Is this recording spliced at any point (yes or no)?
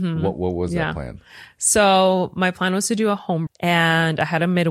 yes